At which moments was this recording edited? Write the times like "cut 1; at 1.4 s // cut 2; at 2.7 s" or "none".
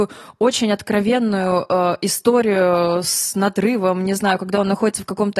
none